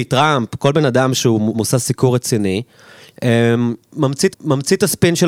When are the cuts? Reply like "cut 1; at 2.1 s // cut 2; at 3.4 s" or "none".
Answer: cut 1; at 1.5 s // cut 2; at 4.3 s